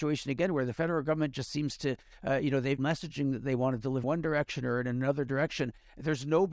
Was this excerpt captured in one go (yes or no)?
no